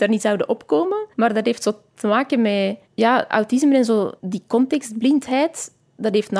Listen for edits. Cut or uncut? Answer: cut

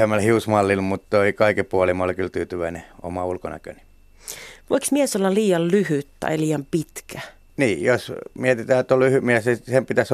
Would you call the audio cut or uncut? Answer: uncut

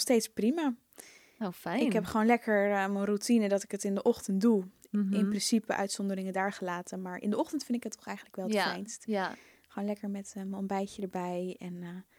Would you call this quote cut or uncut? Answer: uncut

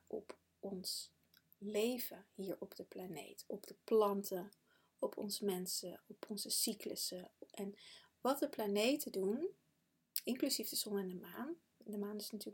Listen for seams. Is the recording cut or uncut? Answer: uncut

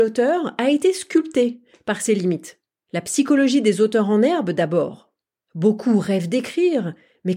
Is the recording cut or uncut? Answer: uncut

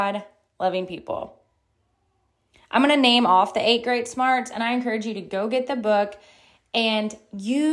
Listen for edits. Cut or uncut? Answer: uncut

